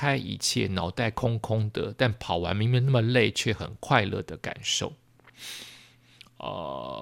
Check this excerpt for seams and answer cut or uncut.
uncut